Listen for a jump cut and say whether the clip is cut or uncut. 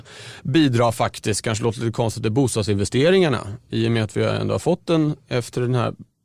uncut